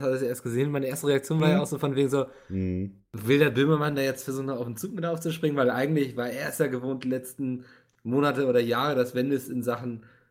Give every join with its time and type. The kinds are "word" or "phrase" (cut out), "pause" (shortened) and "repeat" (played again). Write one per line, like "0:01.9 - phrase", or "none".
none

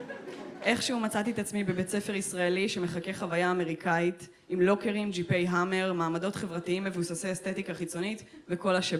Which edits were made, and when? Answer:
none

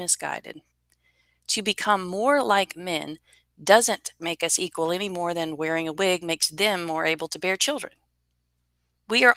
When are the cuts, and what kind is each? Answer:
none

